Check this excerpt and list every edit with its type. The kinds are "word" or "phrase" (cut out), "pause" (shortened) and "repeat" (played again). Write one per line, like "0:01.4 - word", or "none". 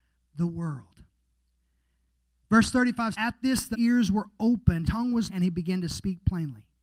0:03.1 - word
0:03.7 - word
0:04.8 - word
0:05.3 - word

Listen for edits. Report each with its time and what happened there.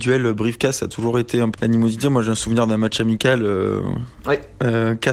0:01.5 - word

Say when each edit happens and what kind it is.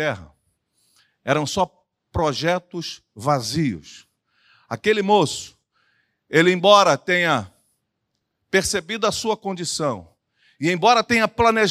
none

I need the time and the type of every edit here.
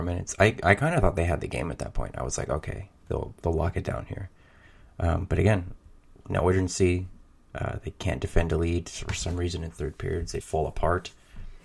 0:10.4 - word

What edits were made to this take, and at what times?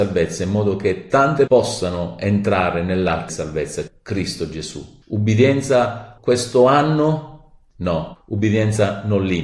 0:01.5 - word
0:03.3 - word
0:03.9 - word
0:06.2 - phrase

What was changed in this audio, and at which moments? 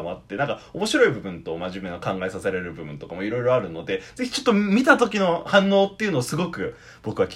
none

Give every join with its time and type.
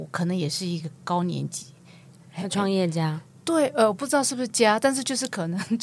none

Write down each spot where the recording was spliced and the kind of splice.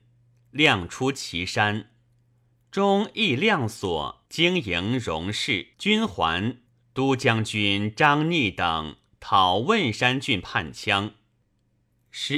0:04.2 - pause
0:05.7 - pause
0:06.7 - pause

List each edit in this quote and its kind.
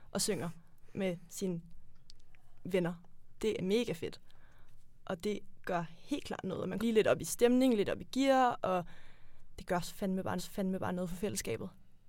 0:03.6 - word
0:06.8 - word
0:10.4 - repeat

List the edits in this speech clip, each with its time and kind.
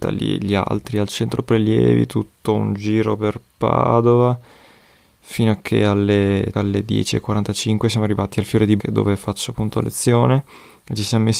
0:06.5 - word
0:08.8 - word

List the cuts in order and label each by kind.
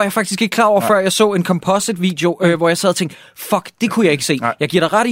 none

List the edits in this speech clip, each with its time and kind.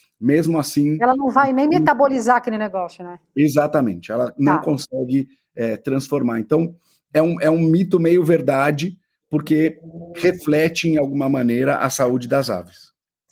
none

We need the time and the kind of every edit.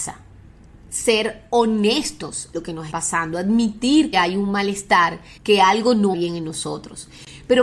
0:02.5 - word
0:02.9 - word
0:04.1 - word
0:05.4 - pause
0:06.1 - word

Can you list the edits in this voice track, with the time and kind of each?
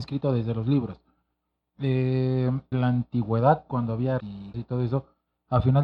0:02.7 - word
0:04.2 - word
0:04.5 - word

